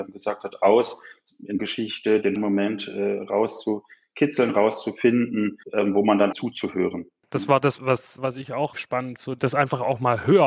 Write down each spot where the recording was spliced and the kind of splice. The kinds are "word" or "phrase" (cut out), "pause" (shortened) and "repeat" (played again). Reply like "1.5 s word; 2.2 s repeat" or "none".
1.6 s phrase; 2.4 s word; 5.6 s pause; 6.3 s word; 7.8 s word; 8.2 s word; 9.2 s word

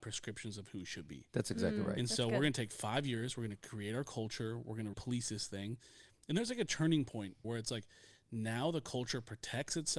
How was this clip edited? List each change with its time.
4.9 s word; 7.4 s phrase

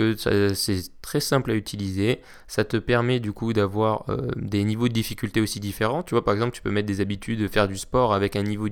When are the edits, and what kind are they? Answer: none

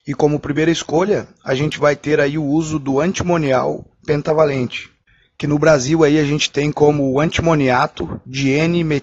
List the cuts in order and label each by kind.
none

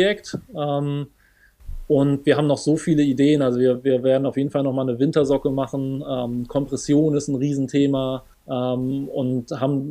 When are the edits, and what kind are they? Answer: 8.3 s pause

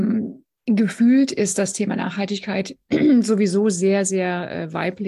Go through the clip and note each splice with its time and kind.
none

